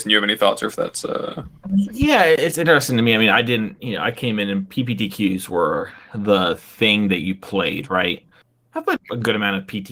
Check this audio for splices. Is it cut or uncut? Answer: cut